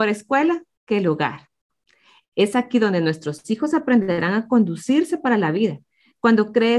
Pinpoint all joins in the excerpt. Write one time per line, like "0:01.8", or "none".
none